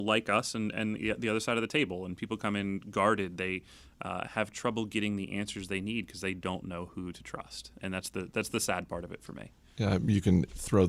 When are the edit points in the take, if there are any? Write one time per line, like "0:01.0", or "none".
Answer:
0:07.8

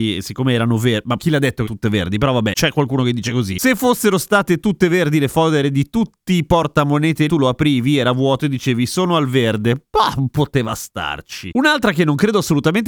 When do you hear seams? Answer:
0:01.2
0:01.7
0:07.3

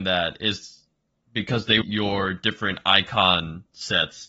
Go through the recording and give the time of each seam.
0:01.8

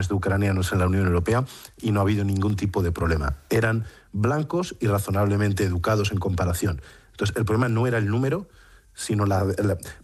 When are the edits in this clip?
none

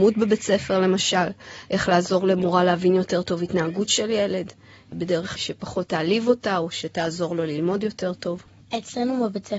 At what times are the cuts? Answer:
none

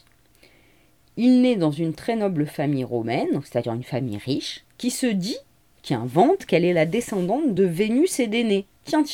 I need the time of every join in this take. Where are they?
none

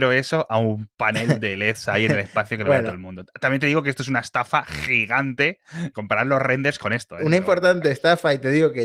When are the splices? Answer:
0:05.9

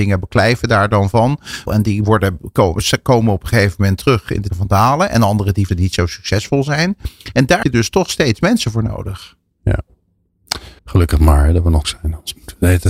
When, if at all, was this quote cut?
0:01.7
0:04.5
0:05.7
0:07.6
0:10.8
0:11.8

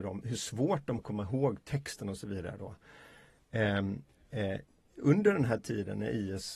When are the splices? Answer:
0:01.0

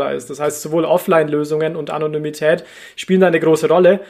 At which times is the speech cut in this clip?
none

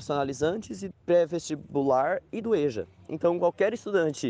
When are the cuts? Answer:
0:00.9
0:02.4

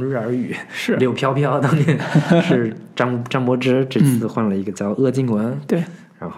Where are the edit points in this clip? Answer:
none

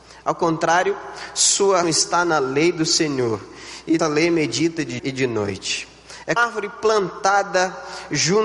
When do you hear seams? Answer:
0:01.8
0:04.0
0:05.0
0:06.4

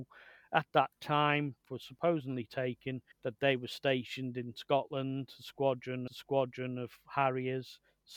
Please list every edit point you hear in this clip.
0:01.6
0:03.1
0:06.1

